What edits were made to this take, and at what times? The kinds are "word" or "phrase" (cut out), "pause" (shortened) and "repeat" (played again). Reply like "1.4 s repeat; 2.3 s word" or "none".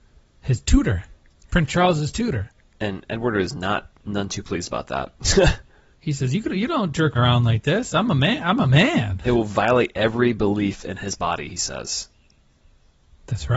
7.2 s word